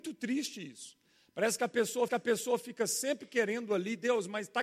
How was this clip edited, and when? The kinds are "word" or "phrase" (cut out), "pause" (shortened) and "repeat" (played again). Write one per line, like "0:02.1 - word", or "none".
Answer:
0:02.1 - repeat

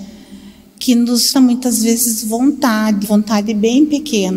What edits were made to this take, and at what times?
0:01.3 - word
0:03.0 - word

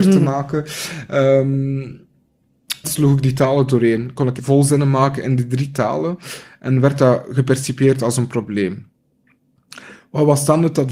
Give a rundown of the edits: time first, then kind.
0:02.8 - phrase
0:04.4 - word

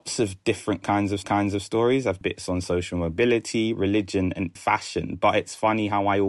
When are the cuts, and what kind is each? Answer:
0:01.2 - repeat
0:02.2 - word
0:04.6 - word

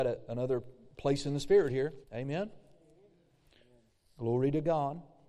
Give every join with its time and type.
0:02.0 - pause

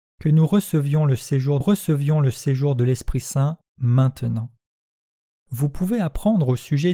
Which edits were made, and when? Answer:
0:01.6 - repeat

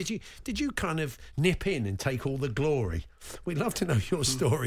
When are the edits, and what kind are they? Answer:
none

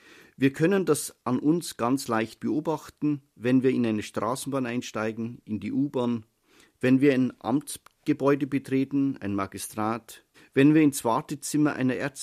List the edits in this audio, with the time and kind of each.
0:01.2 - pause
0:03.3 - pause
0:10.3 - pause

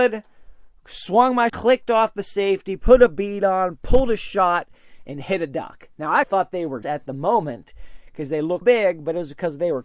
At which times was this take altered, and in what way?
0:01.5 - word
0:06.2 - word
0:06.8 - word
0:08.6 - word

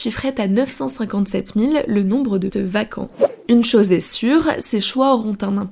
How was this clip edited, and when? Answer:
0:02.5 - word

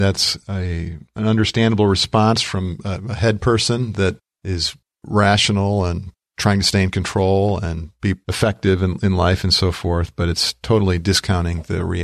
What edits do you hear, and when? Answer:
none

